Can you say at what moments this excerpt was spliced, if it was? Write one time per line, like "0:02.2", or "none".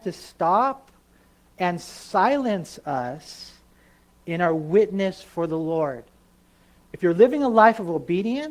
none